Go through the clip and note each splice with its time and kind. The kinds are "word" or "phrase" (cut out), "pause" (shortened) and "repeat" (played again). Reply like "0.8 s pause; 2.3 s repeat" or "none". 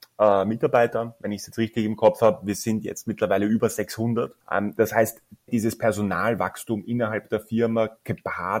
4.4 s pause; 5.5 s word